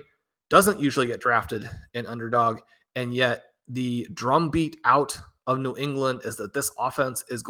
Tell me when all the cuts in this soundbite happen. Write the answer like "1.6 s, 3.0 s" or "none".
none